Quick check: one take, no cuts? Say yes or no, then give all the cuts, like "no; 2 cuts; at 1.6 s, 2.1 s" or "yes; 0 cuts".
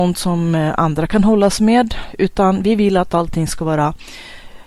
yes; 0 cuts